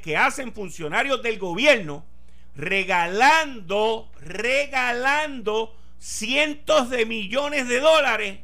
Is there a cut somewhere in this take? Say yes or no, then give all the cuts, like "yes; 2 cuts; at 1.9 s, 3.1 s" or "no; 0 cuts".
no; 0 cuts